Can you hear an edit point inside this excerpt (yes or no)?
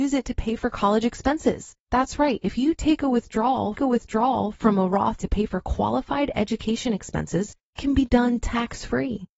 yes